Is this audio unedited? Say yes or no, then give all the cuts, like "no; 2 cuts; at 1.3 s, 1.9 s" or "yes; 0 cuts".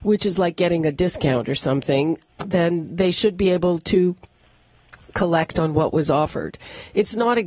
yes; 0 cuts